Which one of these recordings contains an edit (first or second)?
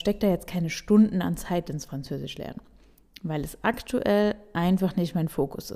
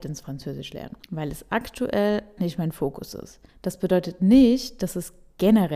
second